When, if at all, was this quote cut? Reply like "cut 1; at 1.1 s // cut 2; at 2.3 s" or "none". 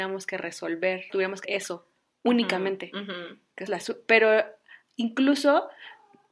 cut 1; at 1.1 s // cut 2; at 1.4 s // cut 3; at 3.7 s